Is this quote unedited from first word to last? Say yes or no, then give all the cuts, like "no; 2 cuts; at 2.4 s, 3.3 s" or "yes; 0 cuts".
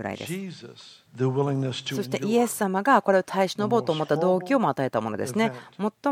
no; 1 cut; at 1.1 s